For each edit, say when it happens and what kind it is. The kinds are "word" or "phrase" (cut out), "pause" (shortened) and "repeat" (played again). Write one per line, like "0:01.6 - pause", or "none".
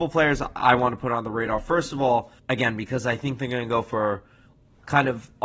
0:02.4 - pause